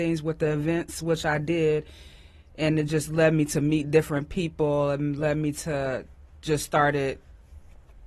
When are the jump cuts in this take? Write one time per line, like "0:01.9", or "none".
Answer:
none